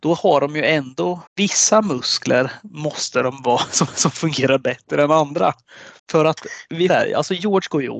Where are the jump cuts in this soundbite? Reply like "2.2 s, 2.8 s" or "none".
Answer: 1.3 s, 3.9 s, 6.0 s, 6.9 s